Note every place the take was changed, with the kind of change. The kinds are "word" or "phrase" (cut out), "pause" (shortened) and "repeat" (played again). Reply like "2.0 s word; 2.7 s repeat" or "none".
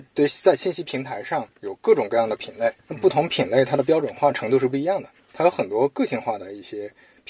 1.5 s pause; 2.8 s pause